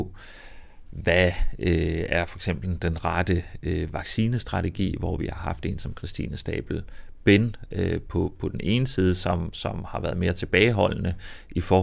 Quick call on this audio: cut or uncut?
uncut